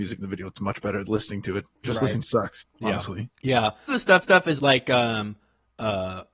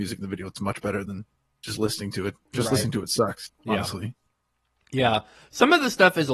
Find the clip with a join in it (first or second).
first